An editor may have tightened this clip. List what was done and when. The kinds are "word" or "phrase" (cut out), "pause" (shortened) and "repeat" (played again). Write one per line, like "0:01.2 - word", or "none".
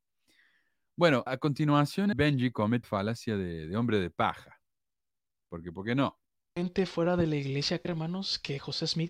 0:01.3 - word
0:02.1 - word
0:02.8 - word
0:07.8 - word